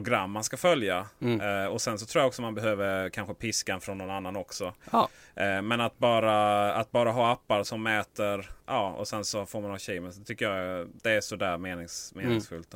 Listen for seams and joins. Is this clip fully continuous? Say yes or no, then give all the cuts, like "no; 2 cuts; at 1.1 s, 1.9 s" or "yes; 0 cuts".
no; 3 cuts; at 7.6 s, 8.6 s, 11.0 s